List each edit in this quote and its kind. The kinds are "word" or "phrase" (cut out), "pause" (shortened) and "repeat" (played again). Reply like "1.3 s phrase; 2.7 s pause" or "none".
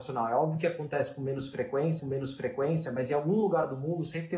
2.0 s repeat